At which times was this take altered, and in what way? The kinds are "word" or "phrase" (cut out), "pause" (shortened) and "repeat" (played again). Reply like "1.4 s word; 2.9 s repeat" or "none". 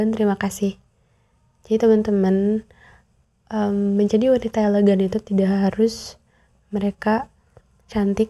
none